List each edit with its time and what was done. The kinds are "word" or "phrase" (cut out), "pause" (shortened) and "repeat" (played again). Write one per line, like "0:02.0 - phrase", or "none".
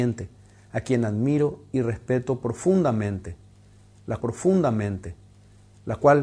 0:04.2 - repeat